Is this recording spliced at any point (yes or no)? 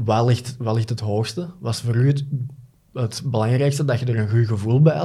no